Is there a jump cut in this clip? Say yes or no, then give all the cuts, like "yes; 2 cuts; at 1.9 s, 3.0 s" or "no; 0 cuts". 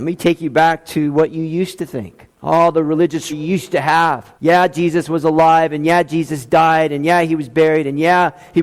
yes; 3 cuts; at 2.3 s, 3.3 s, 4.4 s